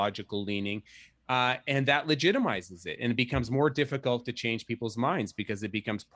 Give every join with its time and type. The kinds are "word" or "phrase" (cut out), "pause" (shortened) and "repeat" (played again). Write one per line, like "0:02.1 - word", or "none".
none